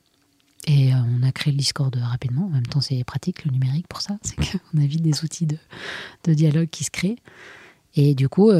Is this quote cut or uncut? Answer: uncut